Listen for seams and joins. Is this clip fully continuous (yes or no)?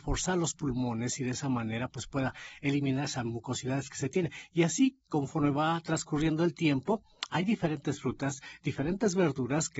yes